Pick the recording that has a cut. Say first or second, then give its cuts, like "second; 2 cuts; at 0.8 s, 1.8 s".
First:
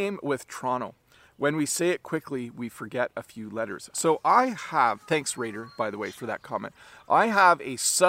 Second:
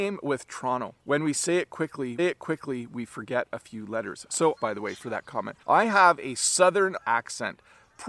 second; 5 cuts; at 1.0 s, 2.2 s, 4.6 s, 5.6 s, 7.0 s